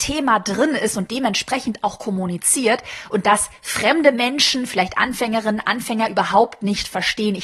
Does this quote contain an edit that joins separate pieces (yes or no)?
no